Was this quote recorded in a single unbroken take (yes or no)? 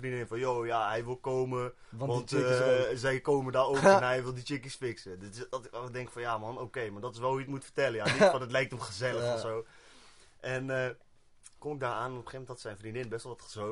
yes